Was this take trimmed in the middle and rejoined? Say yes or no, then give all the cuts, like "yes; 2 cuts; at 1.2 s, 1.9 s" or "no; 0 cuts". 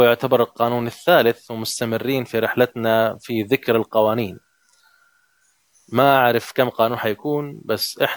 no; 0 cuts